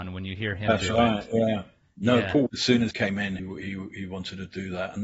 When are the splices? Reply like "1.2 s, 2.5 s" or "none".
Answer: 2.5 s, 2.9 s, 3.4 s